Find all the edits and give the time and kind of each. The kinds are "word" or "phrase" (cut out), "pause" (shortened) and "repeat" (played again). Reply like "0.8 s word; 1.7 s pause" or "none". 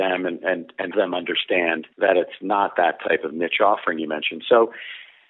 0.9 s word; 1.9 s pause